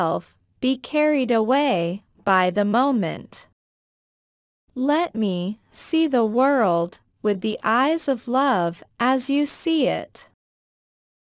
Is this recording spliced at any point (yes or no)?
no